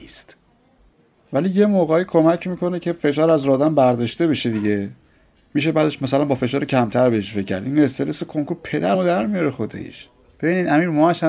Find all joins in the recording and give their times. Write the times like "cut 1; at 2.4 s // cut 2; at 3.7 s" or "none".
cut 1; at 8.9 s